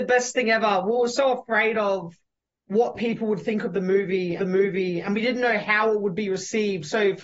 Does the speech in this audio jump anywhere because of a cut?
yes; 1 cut; at 4.4 s

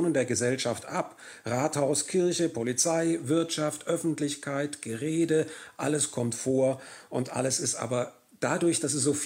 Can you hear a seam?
no; 0 cuts

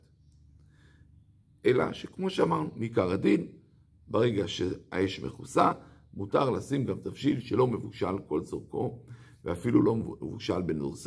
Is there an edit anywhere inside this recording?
no; 0 cuts

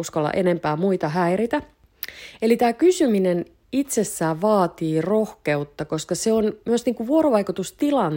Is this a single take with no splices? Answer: yes; 0 cuts

